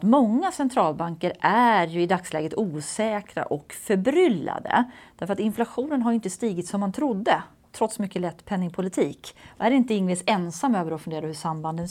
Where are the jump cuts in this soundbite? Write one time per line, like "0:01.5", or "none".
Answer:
none